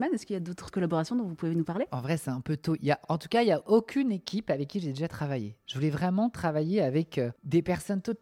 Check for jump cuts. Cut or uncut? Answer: uncut